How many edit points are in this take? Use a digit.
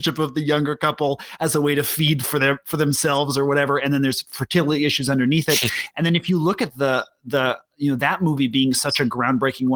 0